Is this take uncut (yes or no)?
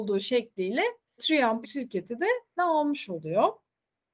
no